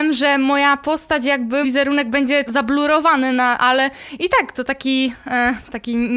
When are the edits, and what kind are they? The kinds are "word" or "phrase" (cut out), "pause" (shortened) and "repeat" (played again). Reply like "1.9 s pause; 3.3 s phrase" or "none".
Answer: 1.6 s word; 2.5 s word; 4.5 s word